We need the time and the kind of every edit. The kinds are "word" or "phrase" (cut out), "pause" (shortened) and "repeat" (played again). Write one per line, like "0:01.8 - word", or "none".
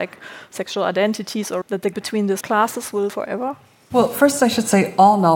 0:01.6 - word
0:01.9 - word
0:02.4 - word
0:03.1 - word